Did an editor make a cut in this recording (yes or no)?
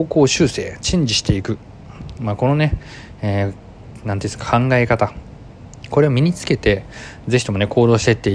no